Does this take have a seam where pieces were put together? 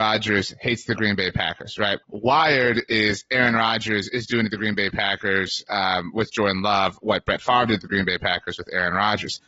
yes; 1 cut; at 2.0 s

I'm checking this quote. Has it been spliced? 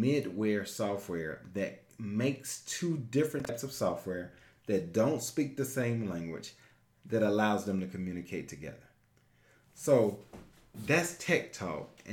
no; 0 cuts

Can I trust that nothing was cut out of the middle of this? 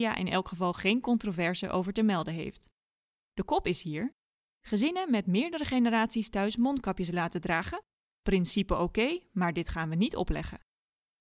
yes; 0 cuts

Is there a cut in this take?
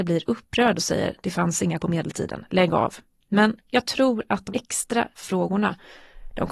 yes; 4 cuts; at 1.2 s, 1.8 s, 4.5 s, 5.1 s

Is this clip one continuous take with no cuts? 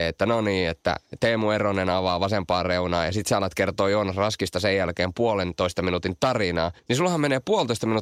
no; 1 cut; at 6.8 s

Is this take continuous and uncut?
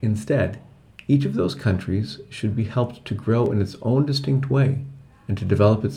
yes; 0 cuts

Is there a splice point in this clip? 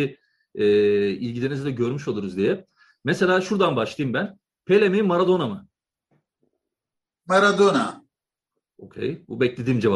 no; 0 cuts

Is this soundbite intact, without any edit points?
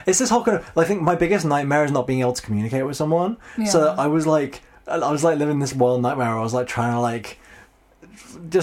yes; 0 cuts

